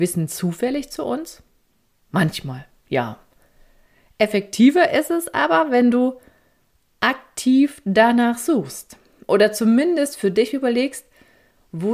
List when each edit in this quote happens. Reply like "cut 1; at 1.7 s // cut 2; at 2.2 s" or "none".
none